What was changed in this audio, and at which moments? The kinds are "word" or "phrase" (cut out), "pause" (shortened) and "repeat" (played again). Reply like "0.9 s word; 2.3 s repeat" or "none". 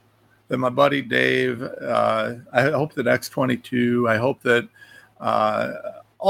none